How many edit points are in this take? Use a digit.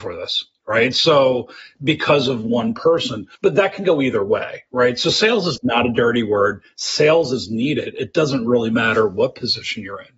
1